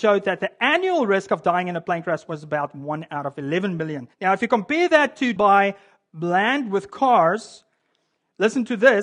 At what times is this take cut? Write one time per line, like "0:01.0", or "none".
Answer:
0:04.1
0:05.4